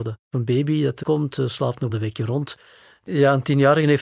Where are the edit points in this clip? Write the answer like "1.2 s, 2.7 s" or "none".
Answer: 1.0 s, 1.9 s